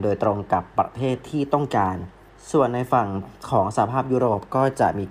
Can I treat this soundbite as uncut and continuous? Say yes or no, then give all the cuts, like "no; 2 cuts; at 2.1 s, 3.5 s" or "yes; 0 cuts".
yes; 0 cuts